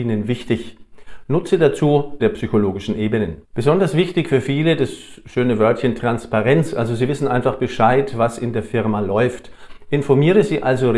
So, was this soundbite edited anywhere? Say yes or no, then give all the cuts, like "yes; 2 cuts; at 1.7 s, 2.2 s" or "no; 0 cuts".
yes; 2 cuts; at 2.2 s, 3.4 s